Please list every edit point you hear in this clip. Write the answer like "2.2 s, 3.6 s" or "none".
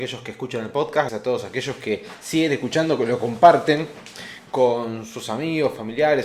1.1 s